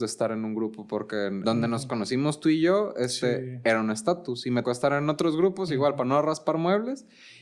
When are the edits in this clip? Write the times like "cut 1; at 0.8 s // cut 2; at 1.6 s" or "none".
cut 1; at 1.4 s // cut 2; at 4.6 s